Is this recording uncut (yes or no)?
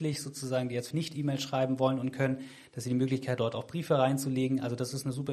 no